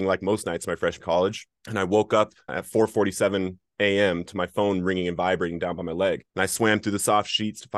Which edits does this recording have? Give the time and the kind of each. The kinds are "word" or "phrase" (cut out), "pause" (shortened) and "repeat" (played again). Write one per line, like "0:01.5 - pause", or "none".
0:01.0 - word
0:01.6 - pause
0:02.5 - word
0:06.3 - pause